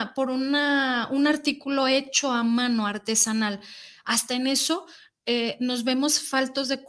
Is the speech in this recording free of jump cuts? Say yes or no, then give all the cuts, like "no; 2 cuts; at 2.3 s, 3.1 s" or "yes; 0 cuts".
yes; 0 cuts